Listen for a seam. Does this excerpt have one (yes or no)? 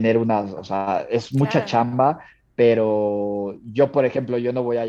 no